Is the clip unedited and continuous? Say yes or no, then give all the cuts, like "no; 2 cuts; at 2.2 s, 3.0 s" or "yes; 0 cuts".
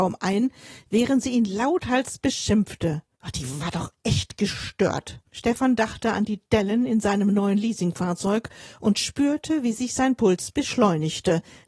no; 2 cuts; at 3.1 s, 5.3 s